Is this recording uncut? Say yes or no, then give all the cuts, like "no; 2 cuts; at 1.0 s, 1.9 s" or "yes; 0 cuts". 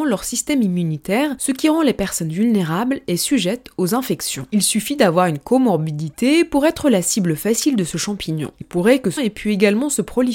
no; 2 cuts; at 8.6 s, 9.2 s